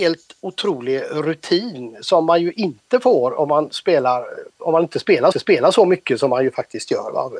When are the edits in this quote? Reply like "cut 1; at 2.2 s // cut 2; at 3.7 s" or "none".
cut 1; at 4.5 s // cut 2; at 5.3 s

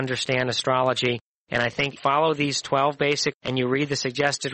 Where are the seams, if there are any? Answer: cut 1; at 2.0 s // cut 2; at 3.3 s

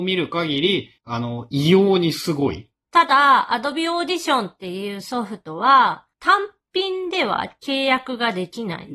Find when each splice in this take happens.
cut 1; at 1.0 s // cut 2; at 2.8 s // cut 3; at 6.1 s

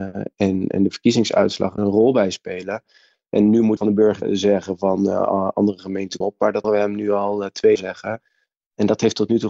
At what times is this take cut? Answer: cut 1; at 1.8 s // cut 2; at 3.8 s // cut 3; at 4.2 s // cut 4; at 6.2 s // cut 5; at 6.6 s // cut 6; at 7.8 s

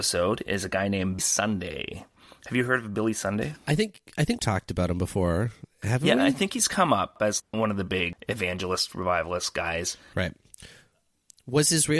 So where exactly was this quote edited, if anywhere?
cut 1; at 1.2 s // cut 2; at 4.4 s // cut 3; at 7.4 s

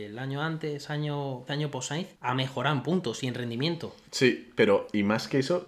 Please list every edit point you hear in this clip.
cut 1; at 1.5 s // cut 2; at 2.1 s // cut 3; at 4.0 s

